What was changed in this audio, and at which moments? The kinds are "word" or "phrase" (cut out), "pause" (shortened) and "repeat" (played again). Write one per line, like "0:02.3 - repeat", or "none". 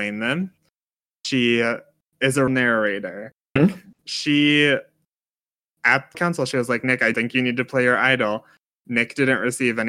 0:02.5 - word
0:03.6 - word
0:06.1 - word
0:07.1 - word